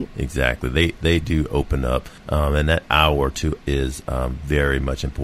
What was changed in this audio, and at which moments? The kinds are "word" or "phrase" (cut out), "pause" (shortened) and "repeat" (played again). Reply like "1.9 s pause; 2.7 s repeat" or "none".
1.2 s word; 2.2 s pause; 3.6 s word

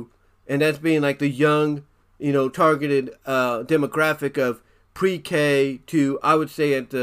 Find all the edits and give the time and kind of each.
none

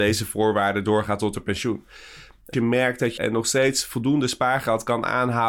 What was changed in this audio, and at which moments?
2.5 s phrase; 3.2 s phrase

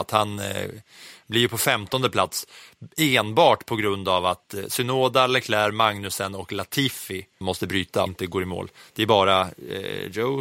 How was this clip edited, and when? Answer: 7.4 s word; 8.1 s word

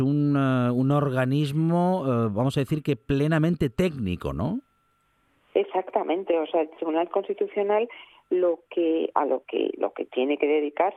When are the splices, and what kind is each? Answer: none

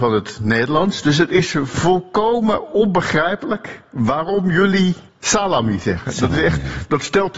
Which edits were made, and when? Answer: 5.1 s pause

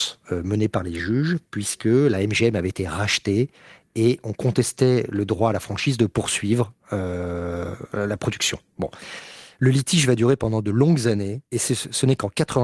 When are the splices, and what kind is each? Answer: 11.5 s pause

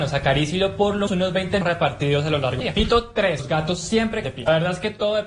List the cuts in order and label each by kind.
1.1 s word; 1.6 s word; 2.6 s word; 4.2 s word

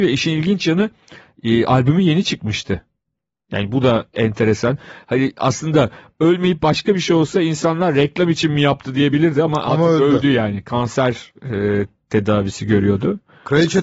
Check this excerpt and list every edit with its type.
none

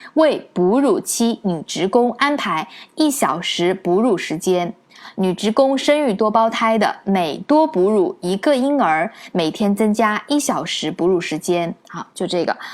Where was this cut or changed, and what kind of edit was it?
11.8 s pause

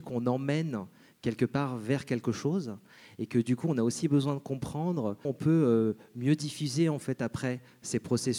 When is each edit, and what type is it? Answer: 5.2 s word

